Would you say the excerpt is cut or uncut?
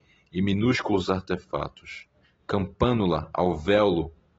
cut